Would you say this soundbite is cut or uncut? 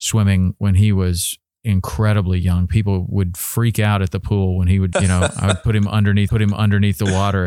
cut